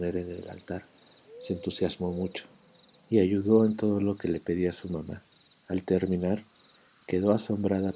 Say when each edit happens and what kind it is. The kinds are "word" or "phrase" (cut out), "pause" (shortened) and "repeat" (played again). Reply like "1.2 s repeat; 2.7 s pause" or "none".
none